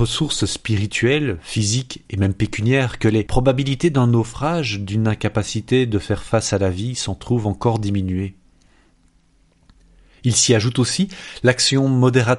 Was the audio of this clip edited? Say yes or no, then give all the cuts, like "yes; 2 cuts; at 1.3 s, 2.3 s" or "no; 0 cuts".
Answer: no; 0 cuts